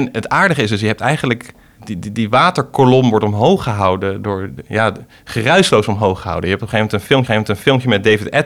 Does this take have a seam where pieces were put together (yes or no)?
yes